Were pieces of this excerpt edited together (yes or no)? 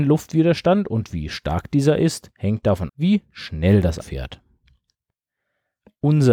yes